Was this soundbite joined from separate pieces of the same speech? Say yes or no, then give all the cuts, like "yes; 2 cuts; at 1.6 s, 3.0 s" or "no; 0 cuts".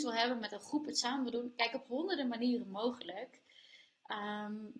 no; 0 cuts